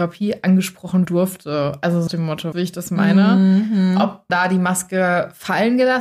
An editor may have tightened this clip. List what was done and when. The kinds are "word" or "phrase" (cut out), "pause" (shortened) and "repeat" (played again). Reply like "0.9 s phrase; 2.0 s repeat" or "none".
1.0 s word; 2.1 s word; 2.5 s word; 4.3 s word